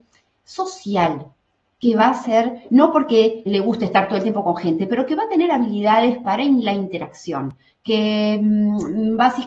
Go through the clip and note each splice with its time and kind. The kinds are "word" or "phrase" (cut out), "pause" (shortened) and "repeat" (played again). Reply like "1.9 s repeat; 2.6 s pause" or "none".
3.5 s word